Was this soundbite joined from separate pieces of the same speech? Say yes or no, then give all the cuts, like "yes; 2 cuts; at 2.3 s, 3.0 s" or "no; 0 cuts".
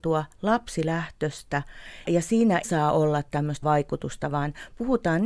yes; 3 cuts; at 2.0 s, 2.6 s, 3.6 s